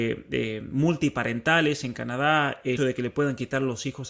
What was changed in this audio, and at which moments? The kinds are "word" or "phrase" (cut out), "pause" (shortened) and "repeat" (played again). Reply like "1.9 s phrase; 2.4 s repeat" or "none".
2.8 s word